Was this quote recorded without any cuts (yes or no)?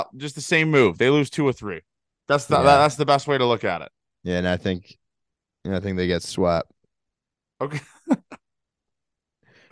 yes